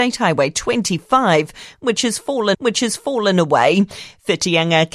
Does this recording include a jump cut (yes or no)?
yes